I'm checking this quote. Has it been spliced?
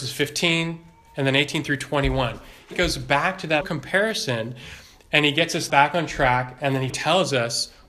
yes; 4 cuts; at 2.7 s, 3.6 s, 5.7 s, 6.9 s

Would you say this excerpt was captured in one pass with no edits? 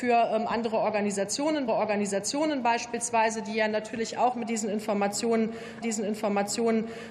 no; 2 cuts; at 1.7 s, 5.8 s

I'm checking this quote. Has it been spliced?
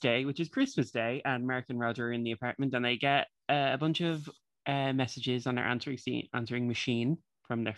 no; 0 cuts

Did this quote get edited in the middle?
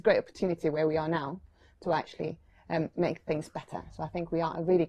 no; 0 cuts

